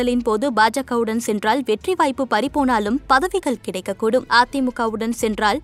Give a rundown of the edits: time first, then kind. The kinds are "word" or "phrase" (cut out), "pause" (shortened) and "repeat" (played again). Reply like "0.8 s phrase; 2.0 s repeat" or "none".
none